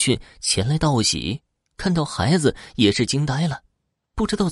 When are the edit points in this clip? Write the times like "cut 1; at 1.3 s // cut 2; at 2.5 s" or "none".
none